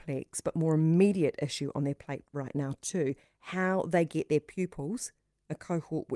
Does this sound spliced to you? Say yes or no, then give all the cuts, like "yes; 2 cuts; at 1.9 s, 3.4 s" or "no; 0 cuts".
no; 0 cuts